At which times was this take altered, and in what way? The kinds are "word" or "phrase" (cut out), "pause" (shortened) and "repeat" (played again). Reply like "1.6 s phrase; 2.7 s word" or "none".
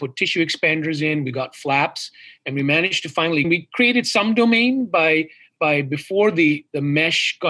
3.4 s phrase